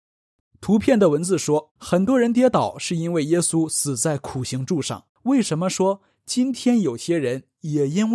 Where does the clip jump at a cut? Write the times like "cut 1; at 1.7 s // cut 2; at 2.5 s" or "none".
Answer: cut 1; at 1.8 s // cut 2; at 5.1 s